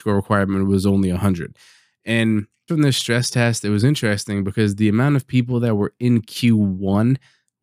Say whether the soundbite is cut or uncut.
cut